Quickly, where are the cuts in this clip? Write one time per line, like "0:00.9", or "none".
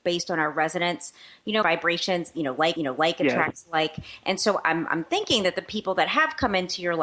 0:01.6
0:02.8